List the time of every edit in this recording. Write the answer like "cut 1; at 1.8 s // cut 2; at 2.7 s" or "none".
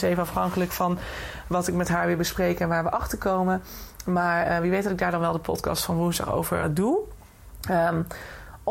cut 1; at 6.6 s